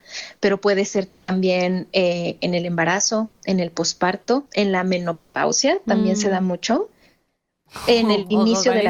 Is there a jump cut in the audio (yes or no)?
no